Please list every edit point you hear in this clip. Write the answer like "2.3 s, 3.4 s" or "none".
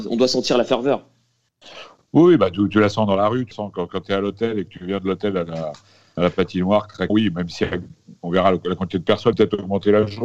2.7 s, 3.5 s, 7.1 s, 9.3 s